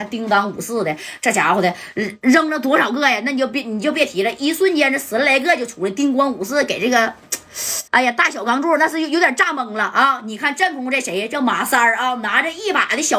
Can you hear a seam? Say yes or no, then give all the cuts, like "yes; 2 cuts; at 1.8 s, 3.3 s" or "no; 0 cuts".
yes; 1 cut; at 7.9 s